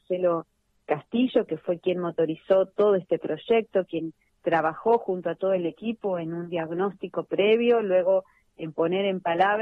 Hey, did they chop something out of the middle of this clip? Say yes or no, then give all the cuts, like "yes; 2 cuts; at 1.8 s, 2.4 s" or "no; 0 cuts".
no; 0 cuts